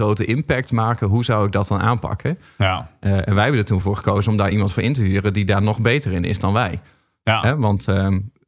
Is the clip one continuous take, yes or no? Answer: yes